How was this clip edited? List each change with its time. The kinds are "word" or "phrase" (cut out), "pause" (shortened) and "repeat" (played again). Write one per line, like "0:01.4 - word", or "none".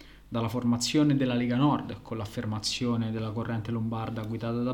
none